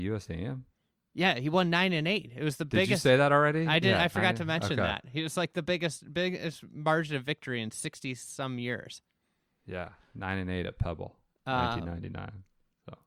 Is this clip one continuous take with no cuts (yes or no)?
yes